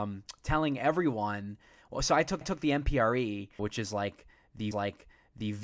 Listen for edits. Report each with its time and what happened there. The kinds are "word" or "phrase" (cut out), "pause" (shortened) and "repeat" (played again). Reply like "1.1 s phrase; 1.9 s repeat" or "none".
2.4 s repeat; 3.6 s word; 4.7 s repeat